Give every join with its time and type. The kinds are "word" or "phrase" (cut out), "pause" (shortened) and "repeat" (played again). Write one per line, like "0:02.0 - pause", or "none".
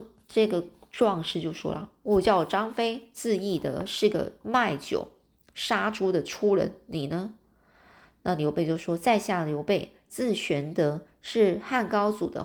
none